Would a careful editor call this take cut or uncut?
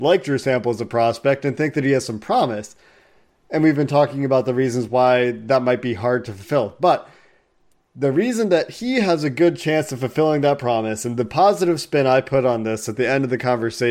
uncut